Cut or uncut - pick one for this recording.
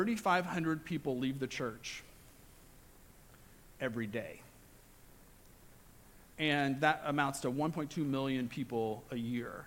uncut